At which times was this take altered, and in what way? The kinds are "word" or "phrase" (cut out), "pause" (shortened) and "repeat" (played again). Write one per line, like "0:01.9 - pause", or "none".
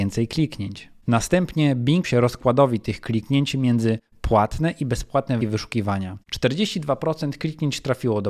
0:02.0 - phrase
0:05.4 - word
0:06.2 - pause

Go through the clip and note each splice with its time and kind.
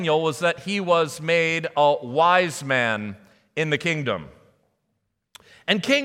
none

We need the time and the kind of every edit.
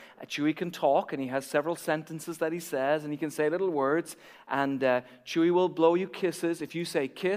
none

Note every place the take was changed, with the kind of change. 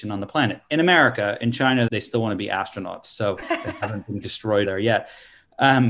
0:01.9 - word
0:03.4 - word
0:04.2 - word
0:04.6 - word

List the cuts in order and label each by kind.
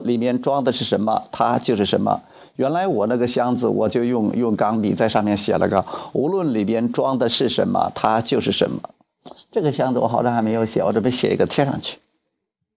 none

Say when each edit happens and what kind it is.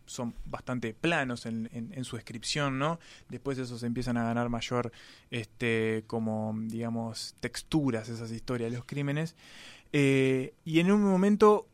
0:01.7 - word
0:10.6 - pause

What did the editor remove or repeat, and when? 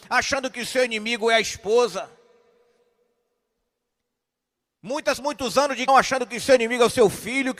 0:05.2 - word
0:05.9 - word

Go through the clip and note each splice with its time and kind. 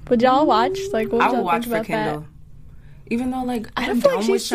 none

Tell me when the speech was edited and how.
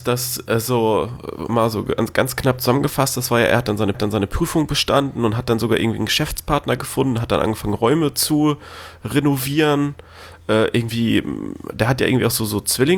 0:01.5 - word
0:03.9 - repeat

